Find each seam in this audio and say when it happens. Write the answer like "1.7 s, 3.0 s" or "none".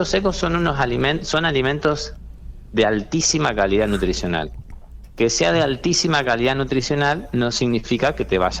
none